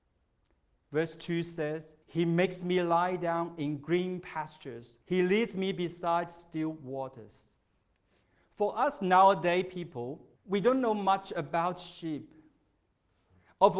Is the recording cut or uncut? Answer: cut